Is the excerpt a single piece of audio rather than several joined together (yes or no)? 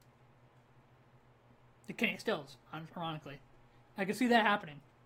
yes